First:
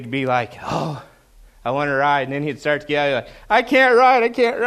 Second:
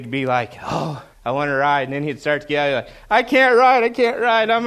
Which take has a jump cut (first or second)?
second